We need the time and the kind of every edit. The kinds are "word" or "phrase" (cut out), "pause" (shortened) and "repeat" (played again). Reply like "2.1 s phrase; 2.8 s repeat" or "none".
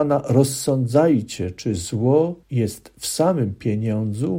2.4 s pause